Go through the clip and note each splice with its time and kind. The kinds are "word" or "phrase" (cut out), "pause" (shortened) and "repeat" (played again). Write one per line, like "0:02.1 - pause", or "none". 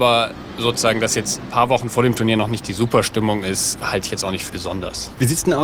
0:04.5 - word